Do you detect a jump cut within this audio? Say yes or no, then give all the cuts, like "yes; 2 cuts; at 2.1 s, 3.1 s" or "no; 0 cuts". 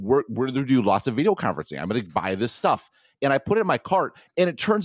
no; 0 cuts